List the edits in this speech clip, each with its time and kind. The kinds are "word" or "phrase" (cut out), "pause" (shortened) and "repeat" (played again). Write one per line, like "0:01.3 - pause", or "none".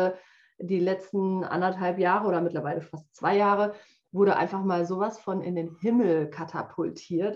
none

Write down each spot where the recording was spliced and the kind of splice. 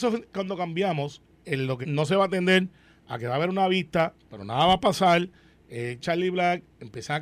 0:01.4 - word
0:01.8 - word
0:06.0 - word

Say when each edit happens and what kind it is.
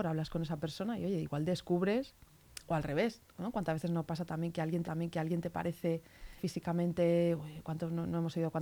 0:04.8 - repeat
0:06.4 - word

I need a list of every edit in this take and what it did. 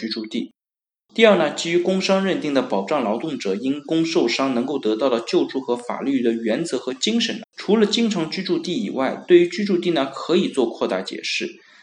0:07.4 - word

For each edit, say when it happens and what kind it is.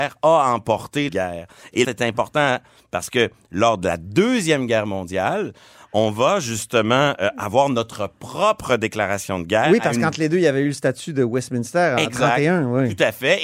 0:01.1 - phrase
0:01.8 - phrase

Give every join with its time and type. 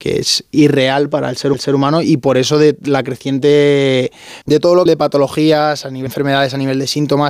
0:01.5 - repeat
0:04.4 - pause
0:04.9 - phrase
0:06.1 - word

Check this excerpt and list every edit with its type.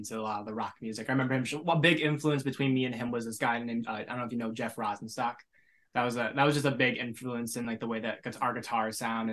none

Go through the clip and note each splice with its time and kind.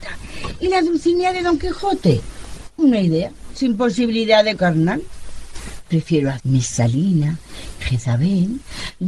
0:04.6 - word
0:06.4 - word

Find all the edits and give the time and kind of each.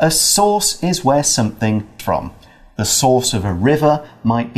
0:02.0 - word

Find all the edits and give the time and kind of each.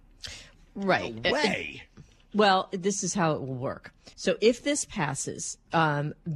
0:04.1 - pause

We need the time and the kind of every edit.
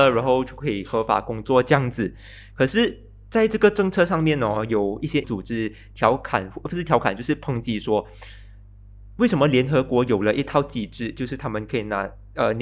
0:05.2 - word

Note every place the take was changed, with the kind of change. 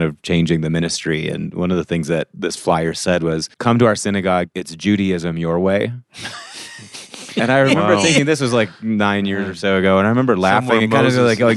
0:03.5 - pause

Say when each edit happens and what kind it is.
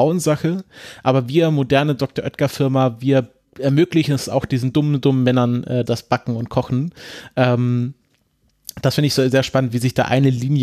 0:05.8 - word

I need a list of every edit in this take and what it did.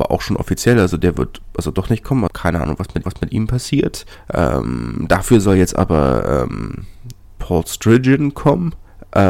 0:02.3 - word
0:03.0 - repeat

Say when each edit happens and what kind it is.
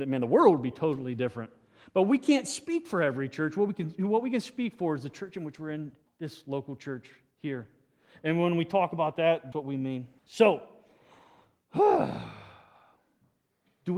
0:06.1 - word
0:09.5 - word
0:10.2 - pause

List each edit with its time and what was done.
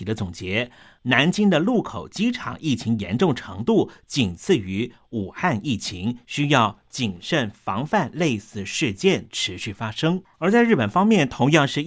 none

